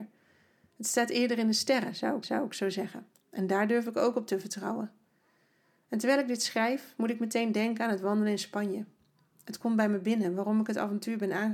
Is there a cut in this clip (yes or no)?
yes